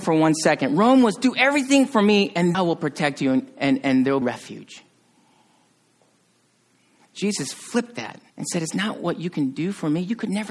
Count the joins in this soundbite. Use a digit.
3